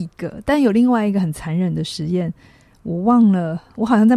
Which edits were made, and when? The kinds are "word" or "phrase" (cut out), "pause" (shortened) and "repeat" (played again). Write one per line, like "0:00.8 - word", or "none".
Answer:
none